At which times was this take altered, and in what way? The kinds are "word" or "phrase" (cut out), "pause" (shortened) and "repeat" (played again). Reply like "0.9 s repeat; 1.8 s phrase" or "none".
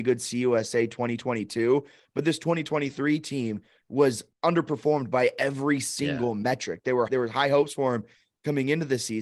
4.3 s pause; 7.1 s word